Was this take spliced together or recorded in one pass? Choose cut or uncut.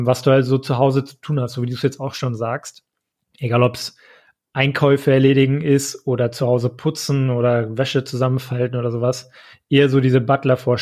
uncut